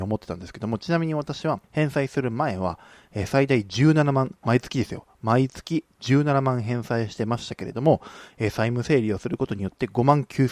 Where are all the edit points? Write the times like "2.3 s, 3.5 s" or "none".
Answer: 1.6 s